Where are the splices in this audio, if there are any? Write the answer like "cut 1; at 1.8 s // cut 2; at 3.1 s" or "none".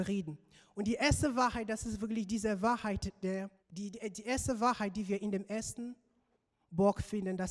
cut 1; at 3.6 s